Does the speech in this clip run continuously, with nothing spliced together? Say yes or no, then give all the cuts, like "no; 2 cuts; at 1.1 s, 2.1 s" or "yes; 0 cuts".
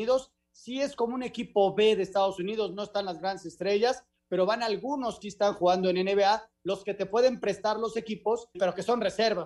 no; 2 cuts; at 5.2 s, 8.5 s